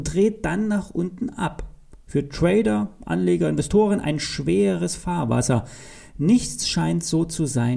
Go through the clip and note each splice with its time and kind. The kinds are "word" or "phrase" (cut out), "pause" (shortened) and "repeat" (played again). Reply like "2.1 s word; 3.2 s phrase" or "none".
none